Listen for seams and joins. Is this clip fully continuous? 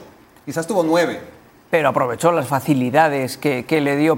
yes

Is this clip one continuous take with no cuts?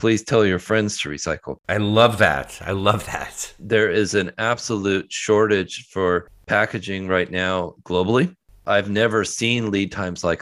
yes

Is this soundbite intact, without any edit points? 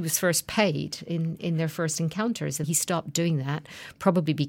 no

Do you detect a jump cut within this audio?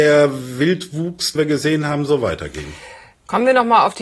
yes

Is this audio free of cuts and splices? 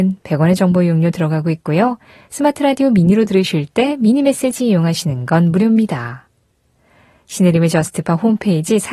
yes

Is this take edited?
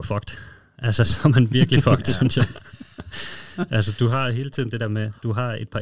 no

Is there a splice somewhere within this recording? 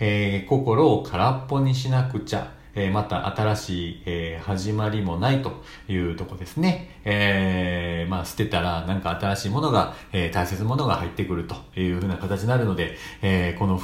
no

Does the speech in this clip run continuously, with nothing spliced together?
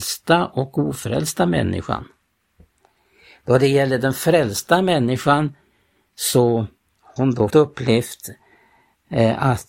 no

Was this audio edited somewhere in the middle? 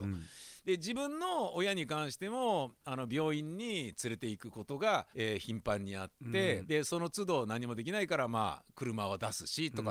yes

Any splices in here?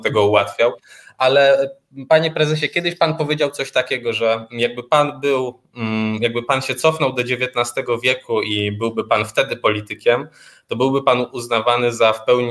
no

